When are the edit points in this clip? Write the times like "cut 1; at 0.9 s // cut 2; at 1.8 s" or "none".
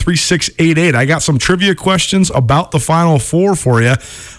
none